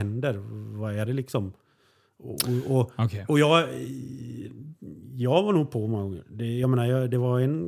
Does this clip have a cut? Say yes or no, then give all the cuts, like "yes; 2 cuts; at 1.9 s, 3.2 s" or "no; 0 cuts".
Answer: no; 0 cuts